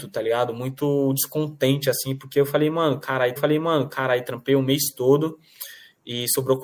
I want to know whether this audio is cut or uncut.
cut